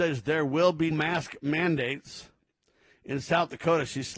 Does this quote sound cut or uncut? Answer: cut